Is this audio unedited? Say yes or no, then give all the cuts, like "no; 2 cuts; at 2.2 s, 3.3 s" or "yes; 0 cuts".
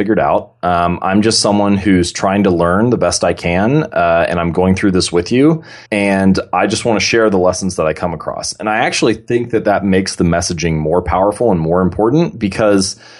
no; 1 cut; at 5.9 s